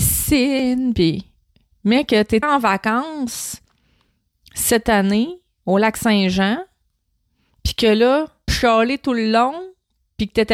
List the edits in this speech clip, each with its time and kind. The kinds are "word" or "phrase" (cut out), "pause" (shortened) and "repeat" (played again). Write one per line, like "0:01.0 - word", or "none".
0:02.4 - word
0:08.5 - word

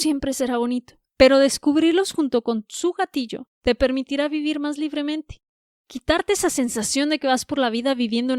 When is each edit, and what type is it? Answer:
0:01.1 - pause
0:03.5 - pause

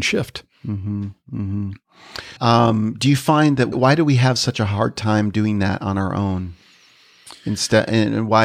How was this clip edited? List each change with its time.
0:02.4 - pause
0:03.7 - word

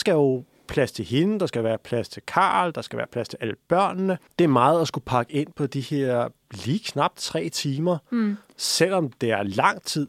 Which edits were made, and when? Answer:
0:04.3 - pause

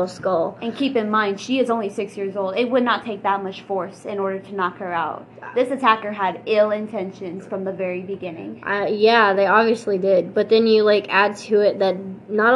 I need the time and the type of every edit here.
none

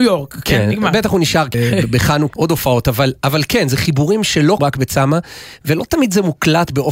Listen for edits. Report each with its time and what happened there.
0:01.5 - phrase
0:02.3 - word
0:04.6 - phrase

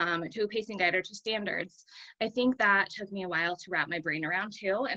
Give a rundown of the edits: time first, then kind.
0:02.6 - word

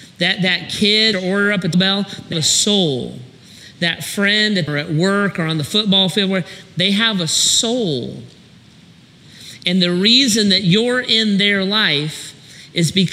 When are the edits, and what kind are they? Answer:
0:01.1 - phrase
0:01.7 - word
0:02.3 - word
0:04.7 - phrase

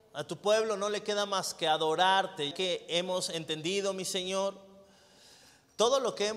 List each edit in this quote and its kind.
0:02.5 - word

